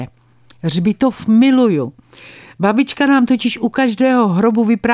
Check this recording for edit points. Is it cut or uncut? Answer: uncut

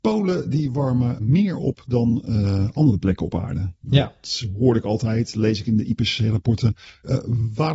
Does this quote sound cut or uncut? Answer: cut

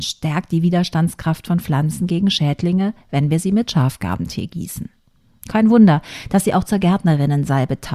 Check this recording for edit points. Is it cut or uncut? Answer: uncut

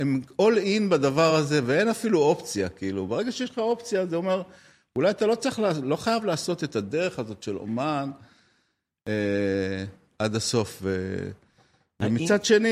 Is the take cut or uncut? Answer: uncut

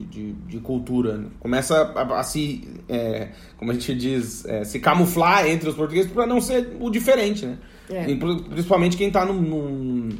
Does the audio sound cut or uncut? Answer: uncut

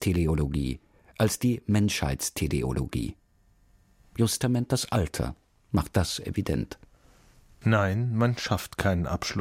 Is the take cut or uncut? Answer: uncut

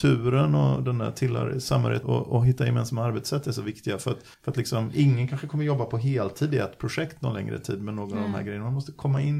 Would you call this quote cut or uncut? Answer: cut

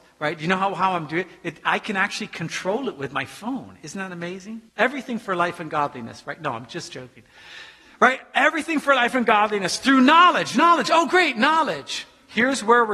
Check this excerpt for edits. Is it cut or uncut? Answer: cut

